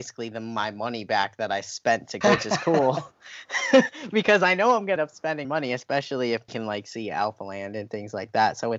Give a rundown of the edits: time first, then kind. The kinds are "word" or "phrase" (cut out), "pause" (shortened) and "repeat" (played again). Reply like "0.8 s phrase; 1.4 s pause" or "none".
2.2 s phrase; 5.0 s word; 5.4 s word; 6.5 s word